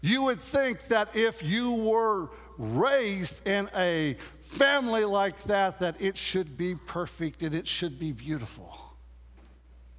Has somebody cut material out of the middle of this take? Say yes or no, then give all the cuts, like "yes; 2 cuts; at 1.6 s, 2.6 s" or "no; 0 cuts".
no; 0 cuts